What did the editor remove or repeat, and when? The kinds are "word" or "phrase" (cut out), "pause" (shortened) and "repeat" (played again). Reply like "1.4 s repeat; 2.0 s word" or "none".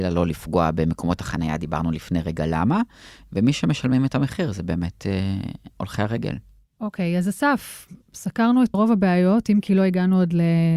8.7 s word